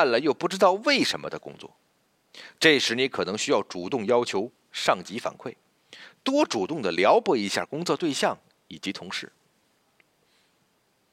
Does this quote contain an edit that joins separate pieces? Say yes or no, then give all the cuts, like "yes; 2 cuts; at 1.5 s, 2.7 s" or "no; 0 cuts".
no; 0 cuts